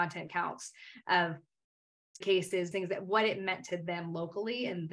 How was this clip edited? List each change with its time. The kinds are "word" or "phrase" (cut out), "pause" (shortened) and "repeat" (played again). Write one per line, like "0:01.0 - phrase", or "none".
0:02.2 - word
0:02.7 - word

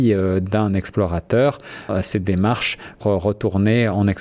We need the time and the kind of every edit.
0:01.9 - word
0:03.0 - word

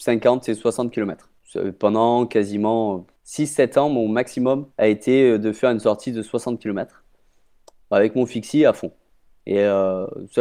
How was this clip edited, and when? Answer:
0:01.4 - pause
0:03.2 - pause
0:04.7 - pause

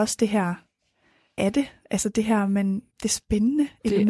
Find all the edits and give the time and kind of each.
0:01.4 - phrase
0:02.9 - pause

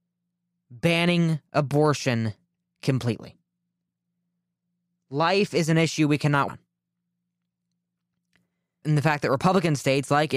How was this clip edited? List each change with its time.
0:06.5 - word
0:08.8 - word

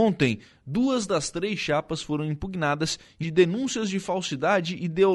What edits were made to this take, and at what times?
0:03.2 - word

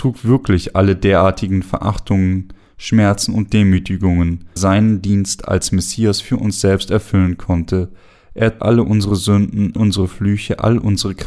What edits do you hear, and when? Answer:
0:04.6 - phrase
0:08.6 - word
0:09.8 - word

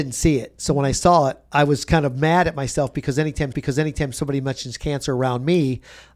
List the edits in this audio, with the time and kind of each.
0:03.5 - repeat

